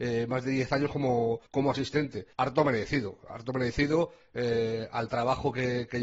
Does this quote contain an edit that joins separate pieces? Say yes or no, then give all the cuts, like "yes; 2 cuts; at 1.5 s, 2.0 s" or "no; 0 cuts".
yes; 2 cuts; at 1.5 s, 2.3 s